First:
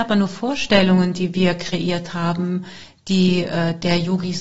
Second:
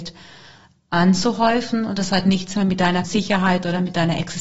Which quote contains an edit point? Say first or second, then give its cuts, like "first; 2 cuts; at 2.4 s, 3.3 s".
second; 1 cut; at 3.0 s